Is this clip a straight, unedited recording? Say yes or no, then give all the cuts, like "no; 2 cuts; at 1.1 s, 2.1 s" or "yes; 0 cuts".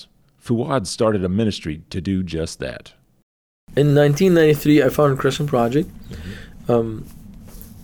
yes; 0 cuts